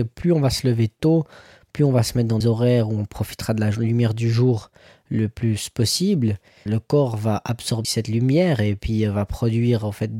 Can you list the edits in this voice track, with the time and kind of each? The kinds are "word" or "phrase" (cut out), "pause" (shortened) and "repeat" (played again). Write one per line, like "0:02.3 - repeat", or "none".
0:02.4 - word
0:06.7 - word
0:07.8 - word